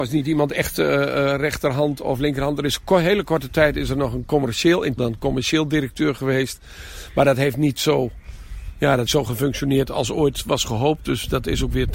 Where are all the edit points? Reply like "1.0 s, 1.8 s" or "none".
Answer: 5.0 s, 9.1 s